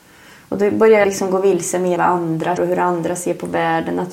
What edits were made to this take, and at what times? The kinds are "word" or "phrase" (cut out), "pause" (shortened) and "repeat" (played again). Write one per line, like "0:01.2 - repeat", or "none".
0:01.0 - word
0:02.0 - word
0:02.6 - word